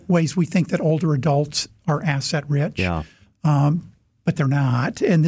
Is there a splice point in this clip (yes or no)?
no